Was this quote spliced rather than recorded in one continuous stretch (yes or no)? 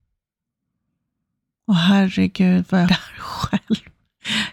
yes